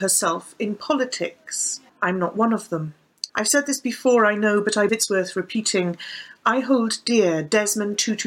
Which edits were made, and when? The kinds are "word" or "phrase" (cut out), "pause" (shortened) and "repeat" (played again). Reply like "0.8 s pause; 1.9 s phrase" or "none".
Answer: 1.9 s pause; 3.3 s pause; 4.9 s word